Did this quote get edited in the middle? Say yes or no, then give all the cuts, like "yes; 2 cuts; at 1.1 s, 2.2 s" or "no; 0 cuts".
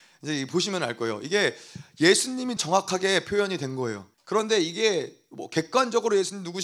yes; 2 cuts; at 2.6 s, 4.1 s